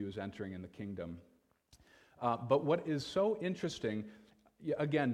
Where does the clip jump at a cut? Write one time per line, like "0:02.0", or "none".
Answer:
none

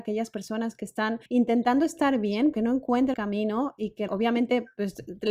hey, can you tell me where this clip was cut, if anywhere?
0:01.3
0:02.5
0:03.1
0:04.1

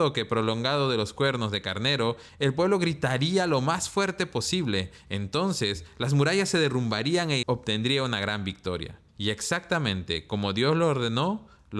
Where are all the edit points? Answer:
0:07.4
0:09.1

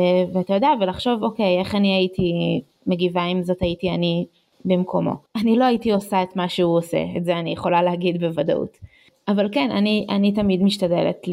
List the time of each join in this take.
0:05.3

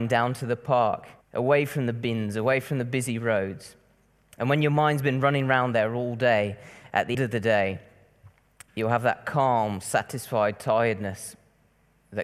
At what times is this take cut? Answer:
0:01.2
0:07.1
0:08.7

